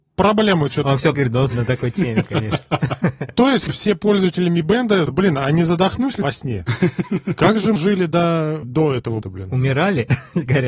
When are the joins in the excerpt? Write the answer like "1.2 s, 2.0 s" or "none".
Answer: 1.1 s, 1.5 s, 3.7 s, 5.1 s, 6.2 s, 7.8 s, 8.6 s, 9.2 s